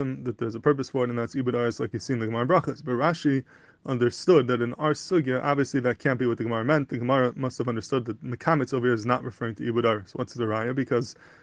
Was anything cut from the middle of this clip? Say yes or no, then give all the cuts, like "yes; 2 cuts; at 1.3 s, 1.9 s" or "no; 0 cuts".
no; 0 cuts